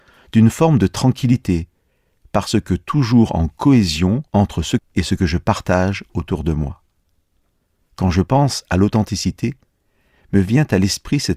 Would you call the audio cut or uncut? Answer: cut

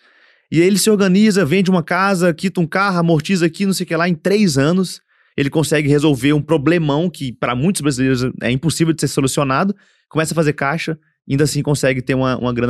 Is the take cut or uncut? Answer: uncut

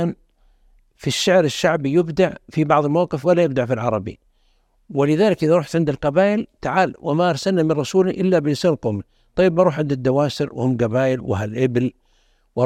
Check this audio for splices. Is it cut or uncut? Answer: uncut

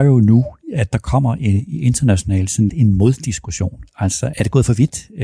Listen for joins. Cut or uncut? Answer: cut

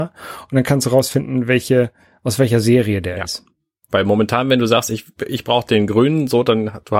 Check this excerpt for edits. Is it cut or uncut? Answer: uncut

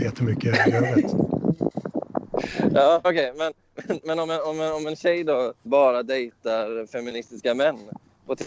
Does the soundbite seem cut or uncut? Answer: cut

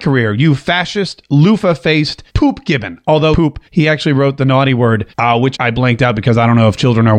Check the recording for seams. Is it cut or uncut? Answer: cut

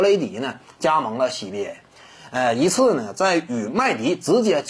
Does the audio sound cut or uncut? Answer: uncut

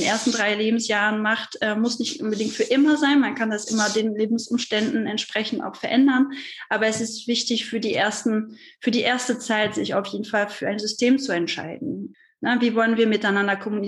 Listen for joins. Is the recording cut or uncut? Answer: uncut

